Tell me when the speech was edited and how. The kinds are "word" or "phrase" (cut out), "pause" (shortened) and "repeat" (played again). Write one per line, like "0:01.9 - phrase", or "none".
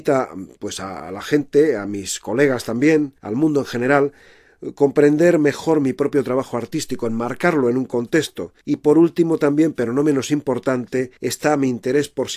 0:03.2 - pause
0:08.6 - pause
0:11.2 - pause

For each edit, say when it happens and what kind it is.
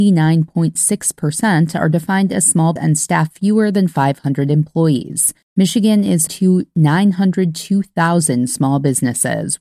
0:02.8 - word
0:05.4 - pause
0:06.3 - word

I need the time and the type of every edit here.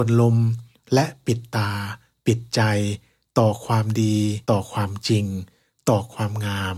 0:04.4 - pause

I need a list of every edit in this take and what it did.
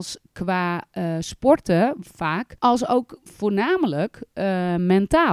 0:02.6 - pause

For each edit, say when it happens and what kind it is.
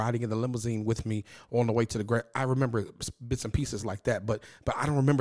none

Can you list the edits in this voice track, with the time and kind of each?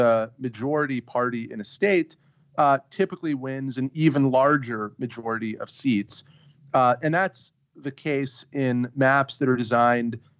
none

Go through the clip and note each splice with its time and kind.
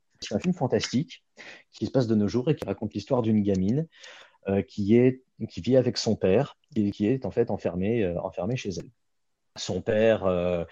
0:06.6 - pause

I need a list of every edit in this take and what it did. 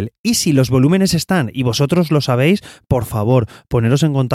none

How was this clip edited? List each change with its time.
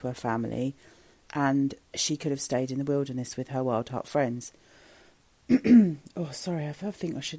none

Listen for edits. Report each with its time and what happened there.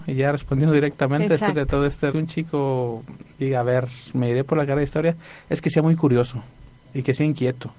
0:02.1 - phrase

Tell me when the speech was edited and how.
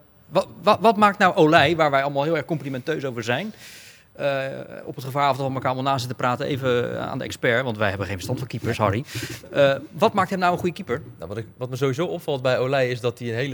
none

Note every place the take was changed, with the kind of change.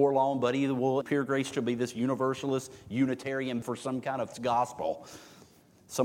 0:01.0 - word
0:01.5 - word
0:03.6 - word
0:04.3 - word

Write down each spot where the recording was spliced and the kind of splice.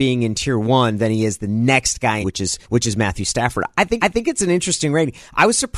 0:02.2 - phrase
0:02.6 - pause
0:04.0 - repeat

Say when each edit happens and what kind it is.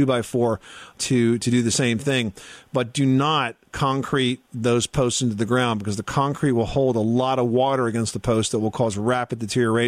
0:01.0 - word

